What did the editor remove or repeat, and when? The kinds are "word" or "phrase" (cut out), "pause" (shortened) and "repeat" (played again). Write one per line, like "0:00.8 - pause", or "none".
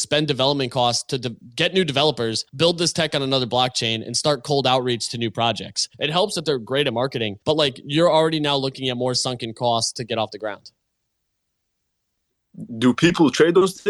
0:02.5 - pause
0:05.9 - pause
0:07.4 - pause